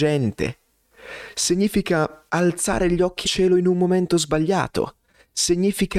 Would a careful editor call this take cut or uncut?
cut